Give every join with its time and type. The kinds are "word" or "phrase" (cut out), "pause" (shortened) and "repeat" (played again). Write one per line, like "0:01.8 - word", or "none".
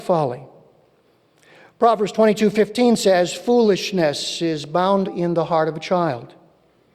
0:05.0 - word